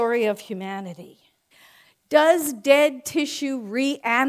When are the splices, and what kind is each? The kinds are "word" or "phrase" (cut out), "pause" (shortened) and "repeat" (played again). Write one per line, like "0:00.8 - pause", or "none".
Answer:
0:01.5 - pause

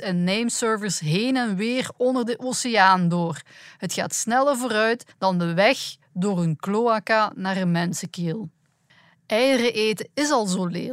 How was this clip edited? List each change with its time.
0:05.1 - pause
0:08.9 - pause

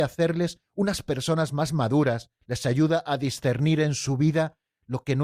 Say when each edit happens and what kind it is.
0:02.4 - pause

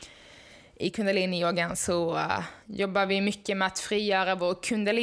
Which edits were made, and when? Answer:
0:02.6 - pause

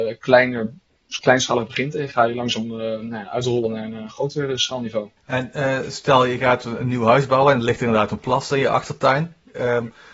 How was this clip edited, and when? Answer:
0:05.2 - pause

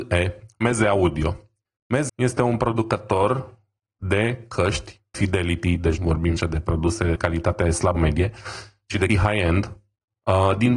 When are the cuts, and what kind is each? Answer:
0:02.1 - word
0:05.1 - word
0:06.0 - word
0:06.4 - word
0:07.2 - word
0:08.0 - word
0:09.1 - word

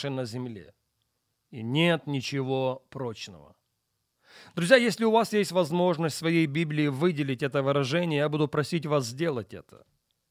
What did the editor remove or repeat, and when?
none

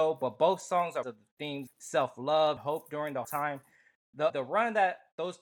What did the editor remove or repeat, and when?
0:01.0 - phrase
0:01.7 - word
0:02.6 - word
0:03.2 - word
0:04.3 - word

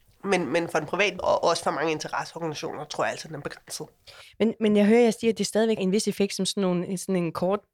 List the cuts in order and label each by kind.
0:01.2 - word
0:05.8 - word

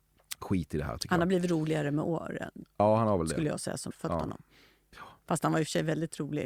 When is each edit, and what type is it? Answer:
0:03.9 - word
0:05.2 - pause

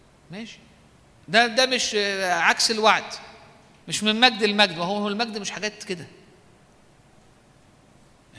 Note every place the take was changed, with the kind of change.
none

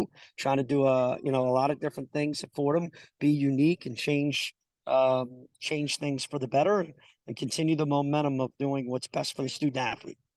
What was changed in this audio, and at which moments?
none

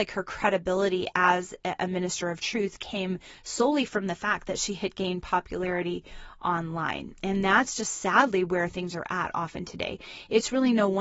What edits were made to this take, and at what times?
none

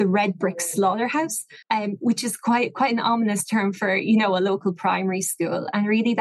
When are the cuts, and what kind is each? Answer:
0:01.6 - pause

